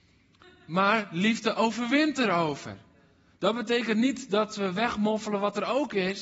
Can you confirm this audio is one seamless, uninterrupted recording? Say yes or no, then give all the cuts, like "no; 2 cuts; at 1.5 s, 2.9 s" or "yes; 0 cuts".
yes; 0 cuts